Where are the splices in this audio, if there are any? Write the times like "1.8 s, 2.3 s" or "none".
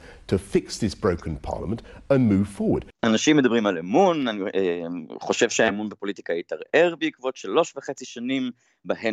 3.0 s